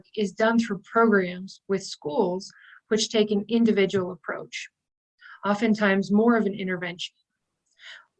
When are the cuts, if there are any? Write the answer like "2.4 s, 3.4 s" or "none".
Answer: none